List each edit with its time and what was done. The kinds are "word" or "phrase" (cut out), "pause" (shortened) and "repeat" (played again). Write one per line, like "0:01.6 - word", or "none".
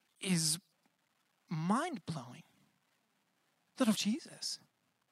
0:03.9 - word